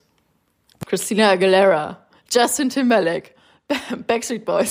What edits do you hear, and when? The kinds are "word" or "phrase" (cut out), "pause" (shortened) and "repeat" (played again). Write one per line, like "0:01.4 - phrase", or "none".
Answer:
none